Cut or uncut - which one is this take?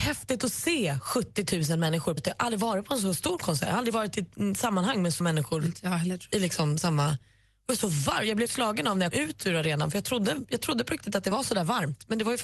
cut